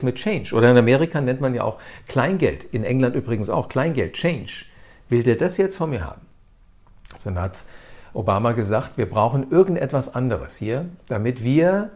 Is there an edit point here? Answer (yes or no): no